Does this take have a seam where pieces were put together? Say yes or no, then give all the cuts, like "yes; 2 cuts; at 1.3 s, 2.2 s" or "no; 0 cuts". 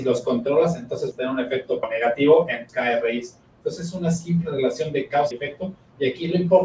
yes; 4 cuts; at 1.1 s, 1.8 s, 2.7 s, 5.3 s